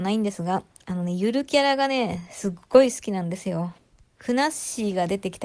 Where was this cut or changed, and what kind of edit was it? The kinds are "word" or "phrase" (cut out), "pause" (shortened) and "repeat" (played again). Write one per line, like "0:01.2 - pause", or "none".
none